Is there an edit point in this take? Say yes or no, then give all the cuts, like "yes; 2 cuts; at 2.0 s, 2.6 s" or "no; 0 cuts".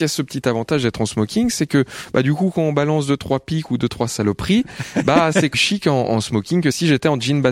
yes; 1 cut; at 5.5 s